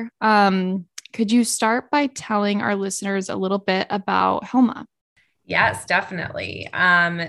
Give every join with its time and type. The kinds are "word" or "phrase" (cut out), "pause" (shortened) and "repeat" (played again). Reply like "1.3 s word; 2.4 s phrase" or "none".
none